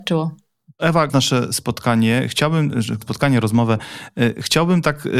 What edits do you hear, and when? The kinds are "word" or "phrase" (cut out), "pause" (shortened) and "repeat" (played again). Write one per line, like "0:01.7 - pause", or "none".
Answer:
0:01.1 - word
0:03.0 - word